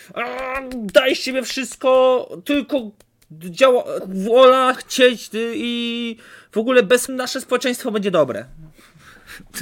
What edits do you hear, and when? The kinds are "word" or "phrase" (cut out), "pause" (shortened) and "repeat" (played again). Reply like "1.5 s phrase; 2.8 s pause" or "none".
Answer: 4.0 s word; 4.7 s word; 7.1 s word